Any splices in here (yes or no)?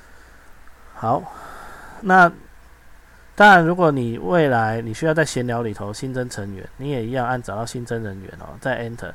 yes